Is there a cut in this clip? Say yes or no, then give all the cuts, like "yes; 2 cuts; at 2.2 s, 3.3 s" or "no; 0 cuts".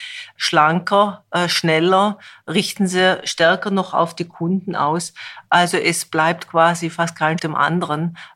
yes; 1 cut; at 7.4 s